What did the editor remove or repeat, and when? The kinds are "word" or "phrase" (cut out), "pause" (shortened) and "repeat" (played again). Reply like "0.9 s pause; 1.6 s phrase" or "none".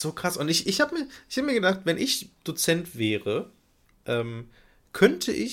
none